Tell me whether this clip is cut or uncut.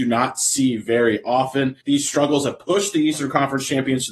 cut